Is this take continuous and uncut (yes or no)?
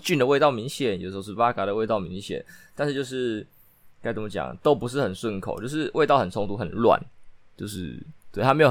yes